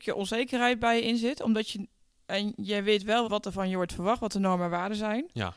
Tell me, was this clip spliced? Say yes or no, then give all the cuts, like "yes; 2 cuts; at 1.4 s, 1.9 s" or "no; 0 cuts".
yes; 2 cuts; at 2.1 s, 3.2 s